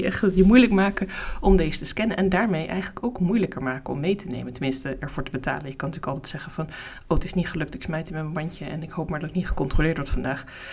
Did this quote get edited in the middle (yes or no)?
no